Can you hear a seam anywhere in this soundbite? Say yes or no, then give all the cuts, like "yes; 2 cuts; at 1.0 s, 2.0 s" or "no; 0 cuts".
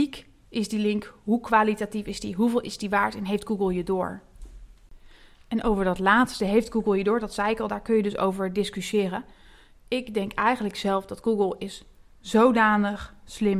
no; 0 cuts